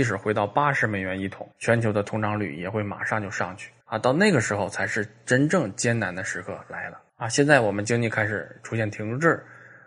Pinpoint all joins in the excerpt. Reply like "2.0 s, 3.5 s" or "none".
1.5 s, 3.8 s, 7.1 s